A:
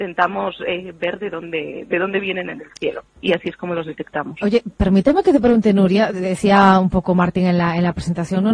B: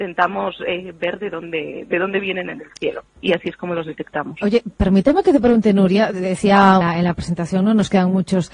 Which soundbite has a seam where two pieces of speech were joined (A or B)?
B